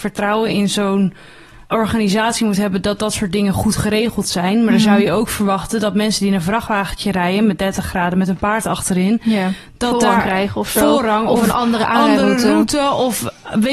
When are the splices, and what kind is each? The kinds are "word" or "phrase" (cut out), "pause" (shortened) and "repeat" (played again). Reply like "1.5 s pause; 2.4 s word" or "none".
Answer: 1.6 s pause